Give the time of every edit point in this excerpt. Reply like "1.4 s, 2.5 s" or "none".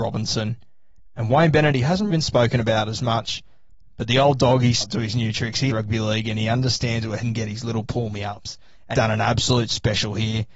2.1 s, 4.8 s, 5.7 s, 7.2 s, 8.9 s